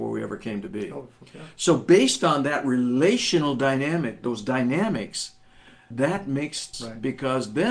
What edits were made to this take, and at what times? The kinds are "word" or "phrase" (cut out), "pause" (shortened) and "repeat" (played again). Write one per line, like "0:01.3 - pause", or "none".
0:05.9 - word
0:06.7 - word